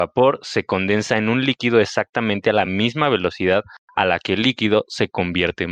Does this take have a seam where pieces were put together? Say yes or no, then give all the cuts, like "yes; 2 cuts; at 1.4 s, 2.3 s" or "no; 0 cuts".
no; 0 cuts